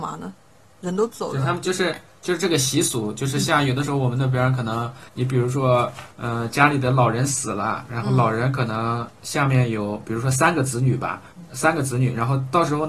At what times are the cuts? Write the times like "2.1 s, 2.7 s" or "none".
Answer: 5.1 s, 6.1 s, 11.3 s